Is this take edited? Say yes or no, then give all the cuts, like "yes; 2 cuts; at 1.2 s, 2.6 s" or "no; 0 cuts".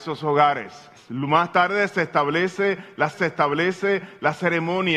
yes; 2 cuts; at 1.0 s, 3.1 s